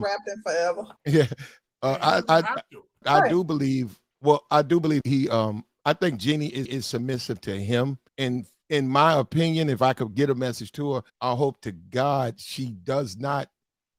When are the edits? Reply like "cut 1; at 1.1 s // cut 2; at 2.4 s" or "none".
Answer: cut 1; at 1.0 s // cut 2; at 3.0 s // cut 3; at 4.1 s // cut 4; at 5.0 s // cut 5; at 6.6 s // cut 6; at 8.1 s // cut 7; at 11.1 s